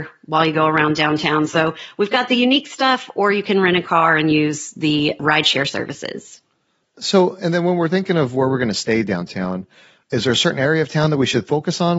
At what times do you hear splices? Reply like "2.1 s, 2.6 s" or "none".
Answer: none